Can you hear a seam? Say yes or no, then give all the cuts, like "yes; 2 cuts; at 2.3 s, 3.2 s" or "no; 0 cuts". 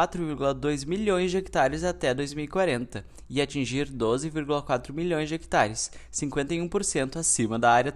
no; 0 cuts